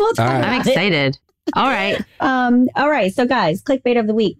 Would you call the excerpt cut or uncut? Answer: cut